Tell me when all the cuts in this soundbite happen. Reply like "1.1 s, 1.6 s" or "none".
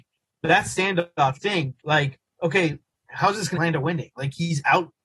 1.3 s, 1.8 s, 2.9 s, 3.5 s